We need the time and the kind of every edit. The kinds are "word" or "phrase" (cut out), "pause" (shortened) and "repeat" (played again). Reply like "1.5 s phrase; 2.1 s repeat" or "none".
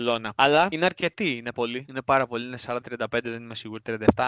1.5 s word; 2.8 s word